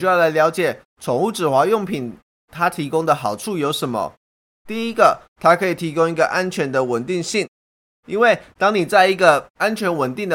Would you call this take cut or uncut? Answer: uncut